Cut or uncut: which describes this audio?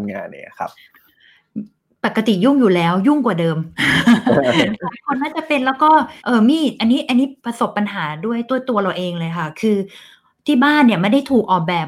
cut